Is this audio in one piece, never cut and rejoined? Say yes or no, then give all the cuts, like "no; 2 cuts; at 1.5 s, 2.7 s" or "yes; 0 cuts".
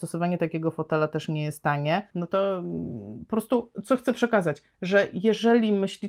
no; 1 cut; at 2.1 s